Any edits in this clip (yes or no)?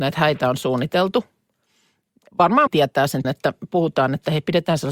yes